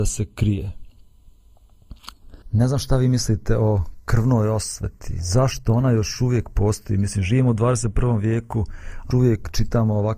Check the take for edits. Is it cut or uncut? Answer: cut